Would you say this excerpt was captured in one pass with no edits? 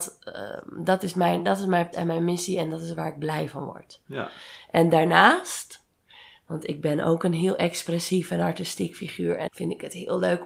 no; 2 cuts; at 1.9 s, 9.5 s

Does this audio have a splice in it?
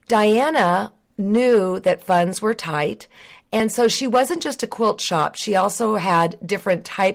no; 0 cuts

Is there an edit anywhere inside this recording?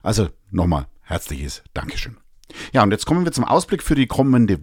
no; 0 cuts

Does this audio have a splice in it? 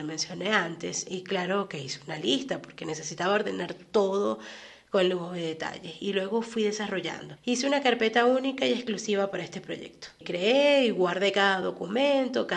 no; 0 cuts

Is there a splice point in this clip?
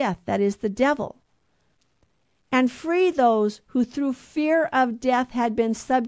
no; 0 cuts

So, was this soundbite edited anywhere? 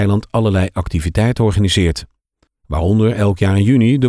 no; 0 cuts

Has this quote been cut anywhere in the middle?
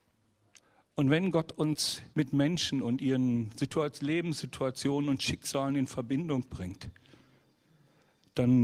yes; 1 cut; at 2.1 s

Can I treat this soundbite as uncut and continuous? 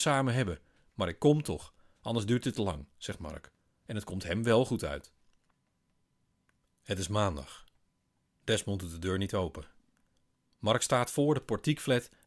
yes; 0 cuts

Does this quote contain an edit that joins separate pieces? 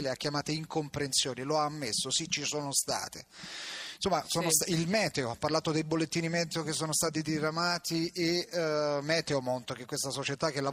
no; 0 cuts

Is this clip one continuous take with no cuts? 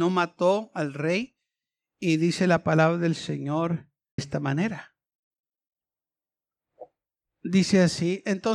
no; 1 cut; at 4.2 s

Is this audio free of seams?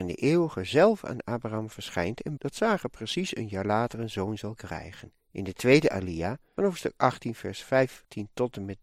no; 3 cuts; at 2.4 s, 5.2 s, 6.6 s

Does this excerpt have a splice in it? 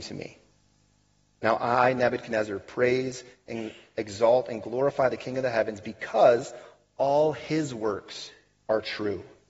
no; 0 cuts

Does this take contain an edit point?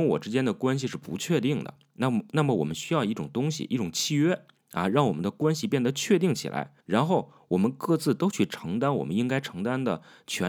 yes; 1 cut; at 6.8 s

